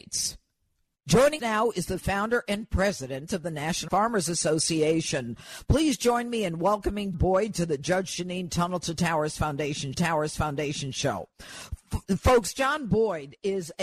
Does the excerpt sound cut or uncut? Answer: cut